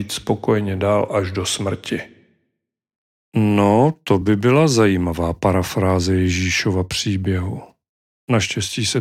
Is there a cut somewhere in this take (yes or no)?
no